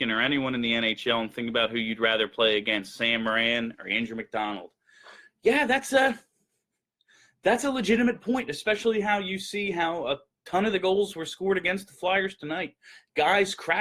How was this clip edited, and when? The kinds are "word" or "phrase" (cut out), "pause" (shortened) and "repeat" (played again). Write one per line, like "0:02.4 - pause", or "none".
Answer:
none